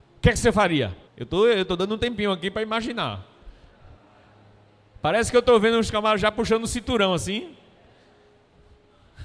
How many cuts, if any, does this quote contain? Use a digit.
1